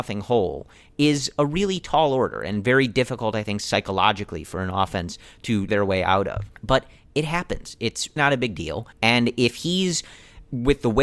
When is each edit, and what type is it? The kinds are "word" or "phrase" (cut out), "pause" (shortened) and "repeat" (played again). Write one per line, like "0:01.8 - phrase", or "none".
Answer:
0:05.7 - word
0:06.6 - pause
0:08.2 - word
0:08.9 - pause